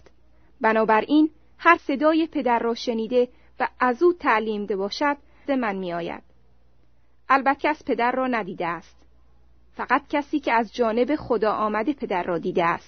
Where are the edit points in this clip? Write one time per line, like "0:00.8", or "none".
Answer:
0:01.8
0:04.7
0:05.5
0:07.6